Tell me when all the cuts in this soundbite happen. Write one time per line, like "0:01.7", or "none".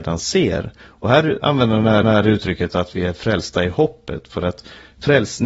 0:02.0